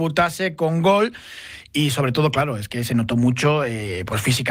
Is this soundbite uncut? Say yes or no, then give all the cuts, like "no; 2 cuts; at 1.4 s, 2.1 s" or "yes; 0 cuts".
yes; 0 cuts